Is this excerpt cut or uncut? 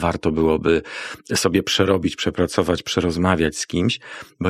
uncut